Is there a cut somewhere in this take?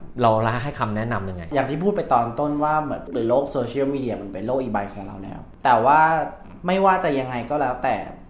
yes; 1 cut; at 3.1 s

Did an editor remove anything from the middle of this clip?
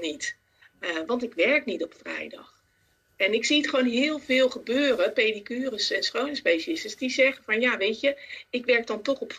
no; 0 cuts

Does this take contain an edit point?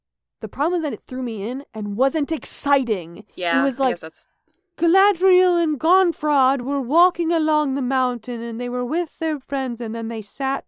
no; 0 cuts

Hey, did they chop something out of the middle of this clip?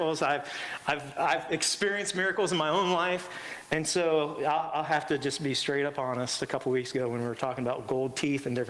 no; 0 cuts

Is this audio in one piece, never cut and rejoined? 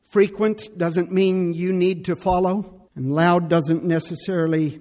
no; 1 cut; at 2.9 s

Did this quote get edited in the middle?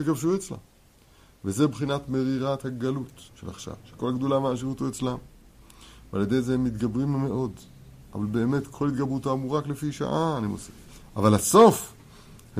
yes; 3 cuts; at 3.3 s, 3.8 s, 10.9 s

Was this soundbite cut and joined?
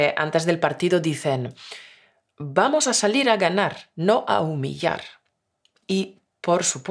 no; 0 cuts

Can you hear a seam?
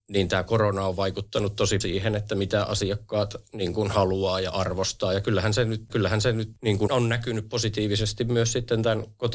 yes; 3 cuts; at 1.8 s, 5.9 s, 6.9 s

